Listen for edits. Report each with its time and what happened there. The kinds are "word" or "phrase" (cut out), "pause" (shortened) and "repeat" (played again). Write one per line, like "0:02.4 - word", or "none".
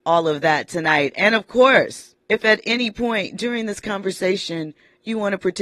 0:02.2 - pause